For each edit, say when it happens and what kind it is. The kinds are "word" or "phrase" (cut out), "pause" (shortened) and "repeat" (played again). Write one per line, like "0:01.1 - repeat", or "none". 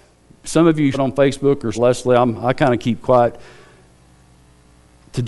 0:00.9 - word
0:01.7 - word